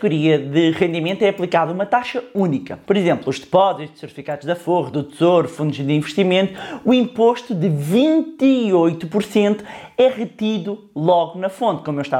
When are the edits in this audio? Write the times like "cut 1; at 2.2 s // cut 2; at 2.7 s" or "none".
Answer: cut 1; at 2.8 s